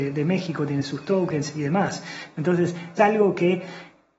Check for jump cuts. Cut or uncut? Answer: cut